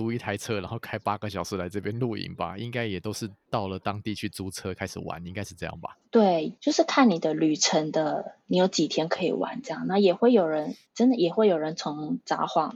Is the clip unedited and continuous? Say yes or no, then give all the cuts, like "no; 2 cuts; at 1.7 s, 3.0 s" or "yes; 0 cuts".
no; 1 cut; at 6.0 s